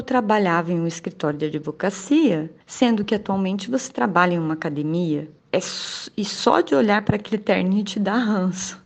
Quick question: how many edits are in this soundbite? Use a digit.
2